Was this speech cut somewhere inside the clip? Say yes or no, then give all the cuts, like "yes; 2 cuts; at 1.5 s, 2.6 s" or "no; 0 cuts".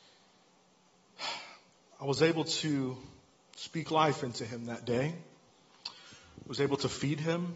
no; 0 cuts